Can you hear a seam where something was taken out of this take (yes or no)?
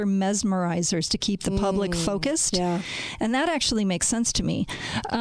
no